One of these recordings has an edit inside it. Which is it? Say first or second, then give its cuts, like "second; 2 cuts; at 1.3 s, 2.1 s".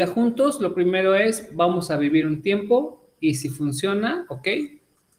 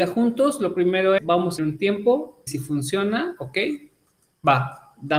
second; 3 cuts; at 1.2 s, 1.6 s, 2.5 s